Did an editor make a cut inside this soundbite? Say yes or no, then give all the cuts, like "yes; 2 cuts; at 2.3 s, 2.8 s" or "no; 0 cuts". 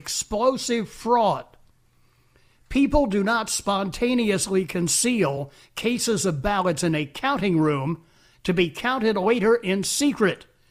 no; 0 cuts